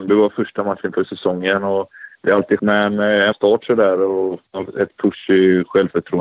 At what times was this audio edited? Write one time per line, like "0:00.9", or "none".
0:02.6
0:03.3